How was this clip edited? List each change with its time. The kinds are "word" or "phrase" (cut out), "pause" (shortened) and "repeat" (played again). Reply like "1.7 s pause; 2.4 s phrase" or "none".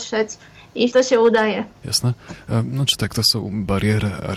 0.9 s word; 1.8 s pause